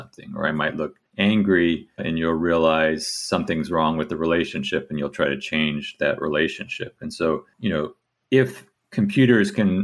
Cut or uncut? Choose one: cut